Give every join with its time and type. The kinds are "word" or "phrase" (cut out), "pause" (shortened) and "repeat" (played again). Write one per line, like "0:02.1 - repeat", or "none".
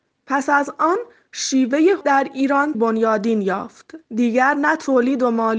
0:02.0 - word
0:02.7 - word
0:04.0 - pause